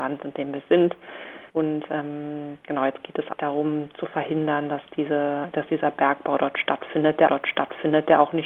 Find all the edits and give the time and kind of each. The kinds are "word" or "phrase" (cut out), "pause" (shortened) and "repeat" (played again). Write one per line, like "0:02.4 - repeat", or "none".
0:01.5 - pause
0:03.3 - word
0:07.3 - repeat